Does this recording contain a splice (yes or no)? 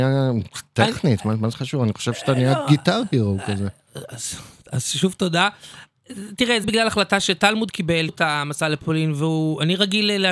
yes